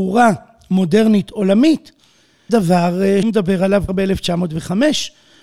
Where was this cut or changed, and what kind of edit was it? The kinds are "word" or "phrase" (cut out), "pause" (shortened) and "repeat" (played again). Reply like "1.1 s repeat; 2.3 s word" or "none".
2.5 s word; 3.2 s word; 3.9 s word